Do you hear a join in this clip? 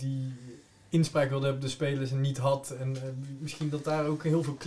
no; 0 cuts

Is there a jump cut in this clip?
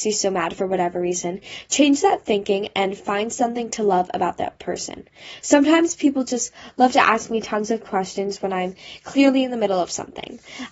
no; 0 cuts

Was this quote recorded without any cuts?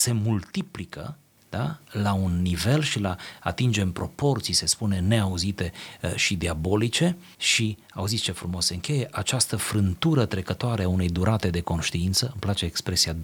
no; 1 cut; at 1.4 s

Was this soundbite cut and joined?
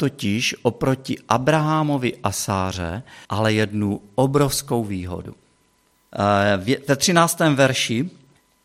yes; 1 cut; at 3.2 s

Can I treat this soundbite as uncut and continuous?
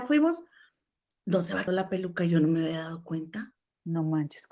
no; 1 cut; at 1.7 s

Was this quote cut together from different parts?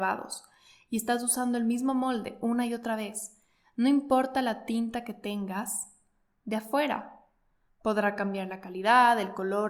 no; 0 cuts

